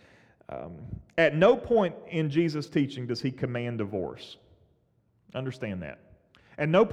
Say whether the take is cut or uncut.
uncut